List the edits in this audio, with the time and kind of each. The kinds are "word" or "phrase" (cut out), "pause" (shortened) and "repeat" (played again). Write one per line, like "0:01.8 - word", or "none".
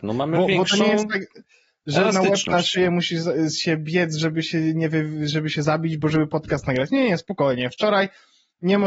none